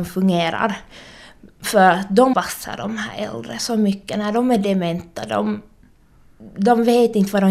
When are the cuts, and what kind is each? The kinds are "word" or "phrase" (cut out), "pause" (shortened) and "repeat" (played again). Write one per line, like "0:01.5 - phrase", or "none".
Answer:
0:02.3 - word